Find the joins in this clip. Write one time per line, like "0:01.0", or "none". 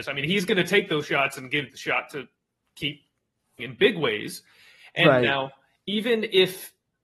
0:01.7
0:03.6